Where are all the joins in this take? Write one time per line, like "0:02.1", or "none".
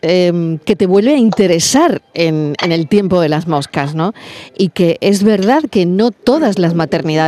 none

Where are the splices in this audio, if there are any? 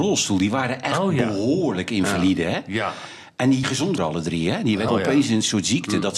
0:03.6
0:04.0
0:04.9

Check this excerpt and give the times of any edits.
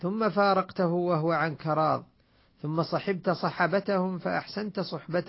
none

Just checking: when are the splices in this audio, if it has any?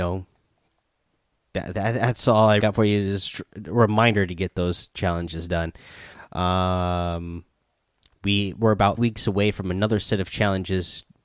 0:02.6
0:09.0

